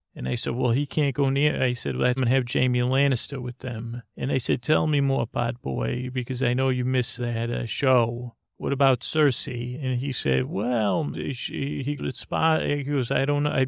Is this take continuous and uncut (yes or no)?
no